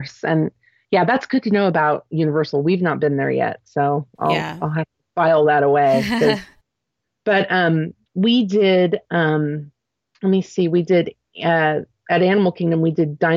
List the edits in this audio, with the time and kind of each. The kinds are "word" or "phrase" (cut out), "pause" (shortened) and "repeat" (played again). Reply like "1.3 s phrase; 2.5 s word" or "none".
none